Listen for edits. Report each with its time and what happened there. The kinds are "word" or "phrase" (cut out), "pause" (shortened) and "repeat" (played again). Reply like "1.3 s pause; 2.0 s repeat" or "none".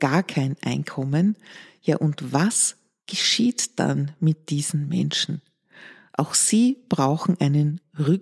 none